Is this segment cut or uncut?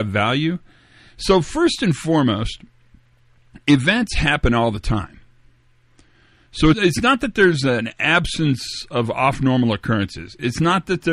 cut